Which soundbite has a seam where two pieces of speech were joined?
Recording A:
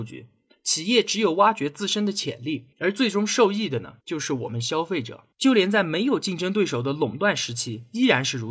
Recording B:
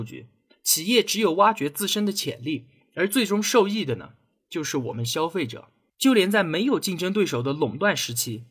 A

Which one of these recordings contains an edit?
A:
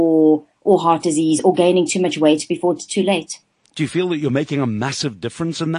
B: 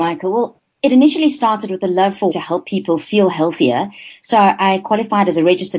B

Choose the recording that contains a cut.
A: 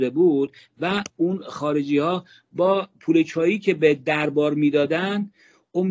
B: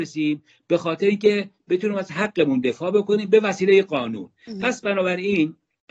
B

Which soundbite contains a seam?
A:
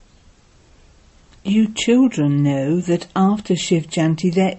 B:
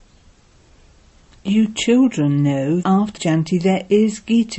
B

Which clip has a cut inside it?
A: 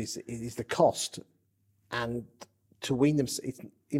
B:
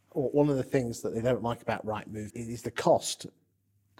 B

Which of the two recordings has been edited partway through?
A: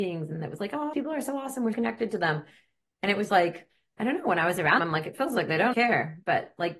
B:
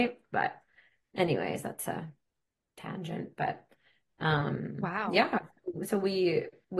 A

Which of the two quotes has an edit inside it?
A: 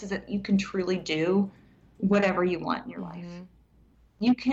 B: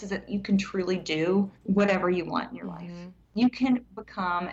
B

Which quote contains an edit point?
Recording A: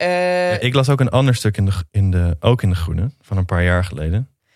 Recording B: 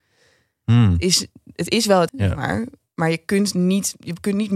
B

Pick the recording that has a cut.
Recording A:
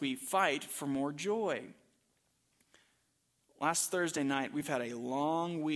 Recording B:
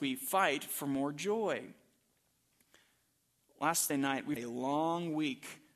B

